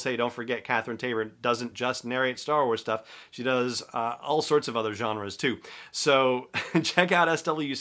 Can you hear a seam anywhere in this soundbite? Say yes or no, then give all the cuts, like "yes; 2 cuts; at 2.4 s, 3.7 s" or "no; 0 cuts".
no; 0 cuts